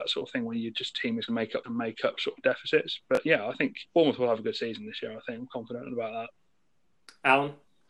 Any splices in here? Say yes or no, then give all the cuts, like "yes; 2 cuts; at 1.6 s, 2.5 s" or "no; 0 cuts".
yes; 3 cuts; at 1.3 s, 1.6 s, 3.9 s